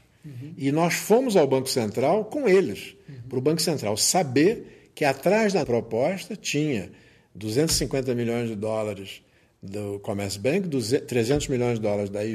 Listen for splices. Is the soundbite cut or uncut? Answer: cut